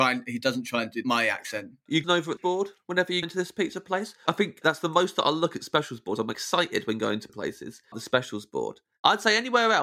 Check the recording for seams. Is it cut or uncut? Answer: cut